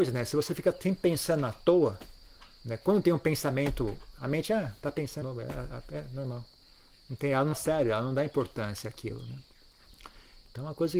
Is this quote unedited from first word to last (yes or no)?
no